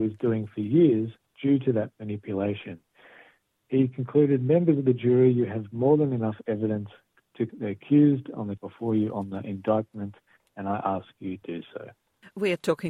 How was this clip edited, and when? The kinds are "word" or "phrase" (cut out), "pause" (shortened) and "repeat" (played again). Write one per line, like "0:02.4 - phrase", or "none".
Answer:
0:07.5 - word
0:08.6 - word
0:11.4 - word